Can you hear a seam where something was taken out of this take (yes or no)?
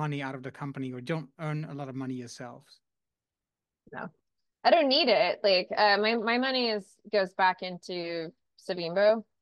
no